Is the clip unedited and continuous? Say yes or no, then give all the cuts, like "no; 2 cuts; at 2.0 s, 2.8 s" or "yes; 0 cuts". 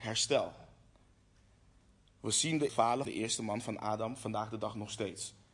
no; 2 cuts; at 2.7 s, 3.0 s